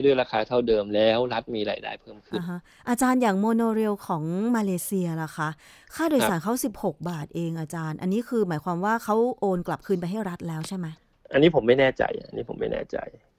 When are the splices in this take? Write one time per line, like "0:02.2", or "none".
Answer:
none